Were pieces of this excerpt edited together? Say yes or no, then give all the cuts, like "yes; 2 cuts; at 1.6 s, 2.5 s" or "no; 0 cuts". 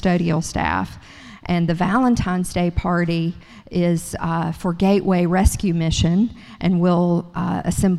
no; 0 cuts